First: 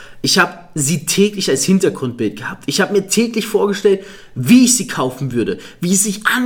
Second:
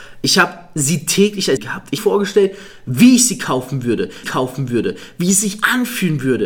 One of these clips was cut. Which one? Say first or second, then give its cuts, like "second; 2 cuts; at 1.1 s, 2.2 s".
second; 3 cuts; at 1.6 s, 2.0 s, 4.2 s